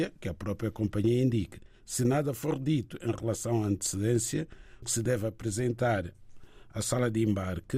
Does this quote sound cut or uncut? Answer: cut